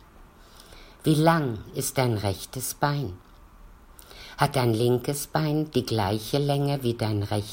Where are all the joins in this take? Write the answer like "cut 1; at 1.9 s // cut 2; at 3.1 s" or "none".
none